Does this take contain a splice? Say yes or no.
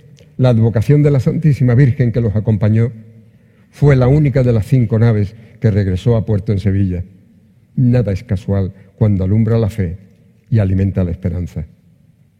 no